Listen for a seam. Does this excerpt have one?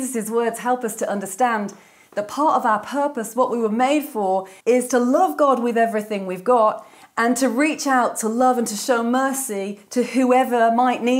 yes; 1 cut; at 4.6 s

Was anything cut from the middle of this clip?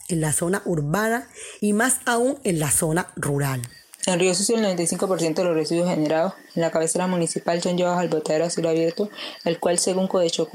no; 0 cuts

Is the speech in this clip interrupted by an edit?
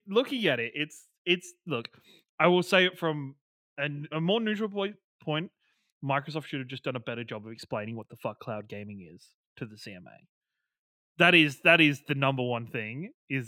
no; 0 cuts

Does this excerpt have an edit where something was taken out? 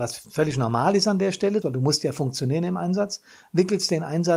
yes; 1 cut; at 1.6 s

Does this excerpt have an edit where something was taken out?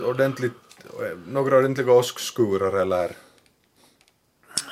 no; 0 cuts

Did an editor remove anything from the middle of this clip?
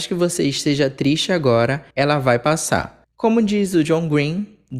yes; 2 cuts; at 1.9 s, 3.0 s

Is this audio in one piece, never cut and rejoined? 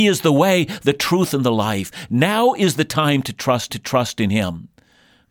no; 1 cut; at 3.7 s

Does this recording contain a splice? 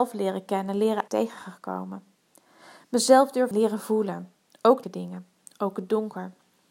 yes; 3 cuts; at 1.1 s, 3.5 s, 4.8 s

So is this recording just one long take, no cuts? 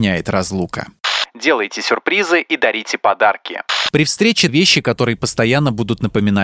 no; 1 cut; at 4.5 s

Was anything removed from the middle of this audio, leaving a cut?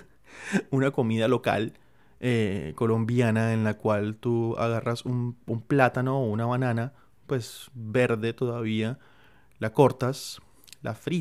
no; 0 cuts

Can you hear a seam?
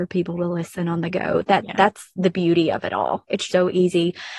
yes; 1 cut; at 3.5 s

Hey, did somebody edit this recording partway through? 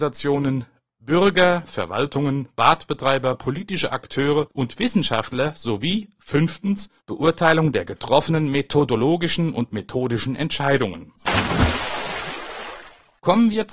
yes; 1 cut; at 7.0 s

